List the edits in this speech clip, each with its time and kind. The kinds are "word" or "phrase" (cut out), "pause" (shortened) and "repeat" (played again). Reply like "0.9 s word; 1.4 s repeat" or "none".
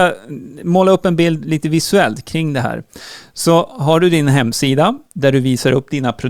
none